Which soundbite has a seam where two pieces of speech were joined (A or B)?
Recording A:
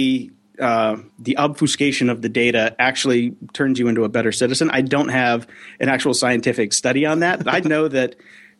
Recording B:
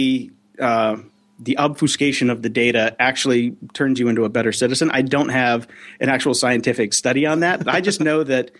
A